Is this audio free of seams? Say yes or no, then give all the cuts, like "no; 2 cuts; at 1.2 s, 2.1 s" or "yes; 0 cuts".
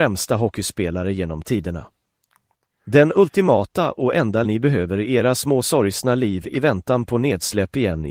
no; 1 cut; at 4.4 s